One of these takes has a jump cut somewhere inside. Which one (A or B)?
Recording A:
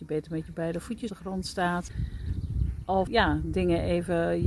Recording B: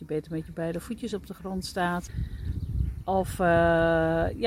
A